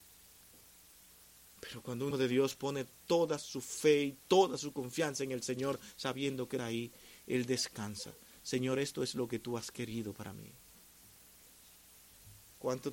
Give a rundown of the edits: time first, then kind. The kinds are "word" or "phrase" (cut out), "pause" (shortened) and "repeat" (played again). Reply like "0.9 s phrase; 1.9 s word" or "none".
2.1 s word; 6.6 s word